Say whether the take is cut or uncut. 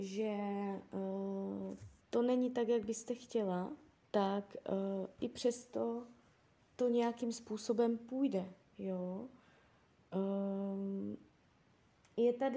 cut